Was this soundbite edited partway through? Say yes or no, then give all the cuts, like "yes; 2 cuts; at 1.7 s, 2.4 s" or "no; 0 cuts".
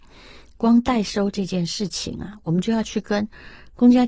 no; 0 cuts